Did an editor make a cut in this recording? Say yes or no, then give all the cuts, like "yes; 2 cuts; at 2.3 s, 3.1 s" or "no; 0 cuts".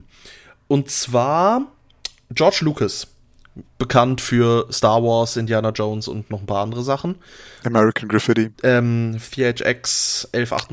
yes; 2 cuts; at 3.7 s, 8.5 s